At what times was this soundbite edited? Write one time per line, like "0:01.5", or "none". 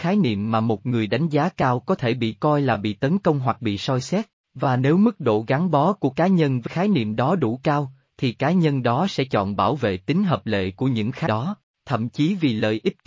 0:06.7
0:11.3